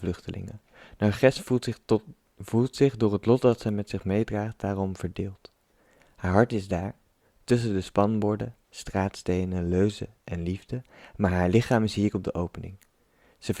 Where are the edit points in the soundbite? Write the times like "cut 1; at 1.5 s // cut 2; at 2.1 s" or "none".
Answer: none